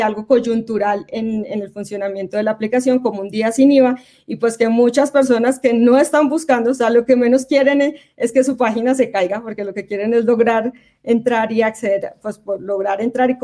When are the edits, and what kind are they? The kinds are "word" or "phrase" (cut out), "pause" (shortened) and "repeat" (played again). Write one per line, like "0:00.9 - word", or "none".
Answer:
none